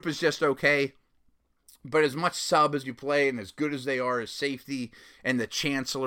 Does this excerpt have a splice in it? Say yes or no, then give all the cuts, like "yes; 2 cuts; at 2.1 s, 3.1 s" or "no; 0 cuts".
no; 0 cuts